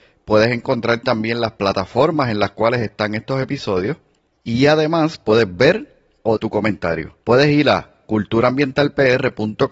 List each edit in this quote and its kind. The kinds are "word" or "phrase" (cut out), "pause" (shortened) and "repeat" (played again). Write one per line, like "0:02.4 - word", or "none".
0:06.4 - word
0:07.2 - pause